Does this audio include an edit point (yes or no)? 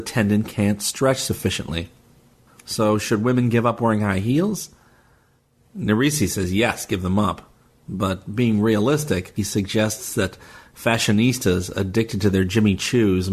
no